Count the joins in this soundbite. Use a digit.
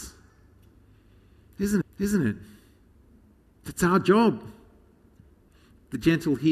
1